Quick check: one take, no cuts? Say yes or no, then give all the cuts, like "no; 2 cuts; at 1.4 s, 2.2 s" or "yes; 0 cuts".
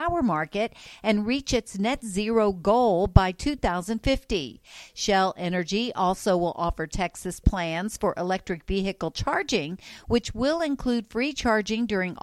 yes; 0 cuts